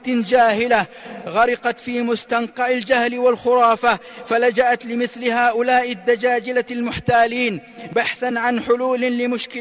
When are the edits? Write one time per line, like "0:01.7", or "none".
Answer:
none